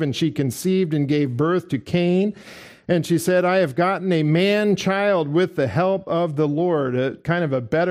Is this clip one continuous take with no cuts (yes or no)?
yes